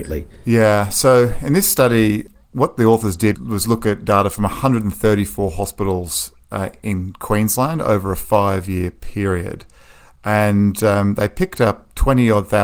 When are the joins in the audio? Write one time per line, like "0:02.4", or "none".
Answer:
0:03.3